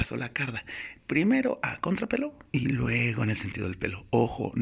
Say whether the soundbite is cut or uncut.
cut